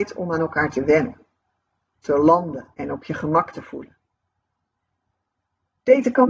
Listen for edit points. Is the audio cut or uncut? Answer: cut